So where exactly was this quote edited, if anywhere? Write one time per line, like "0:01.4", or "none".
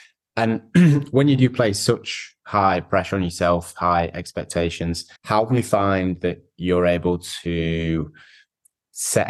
0:05.2